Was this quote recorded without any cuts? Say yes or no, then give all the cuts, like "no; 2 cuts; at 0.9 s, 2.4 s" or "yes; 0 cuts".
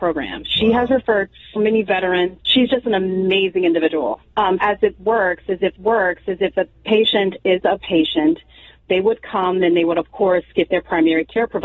no; 5 cuts; at 1.6 s, 2.4 s, 4.6 s, 5.8 s, 7.8 s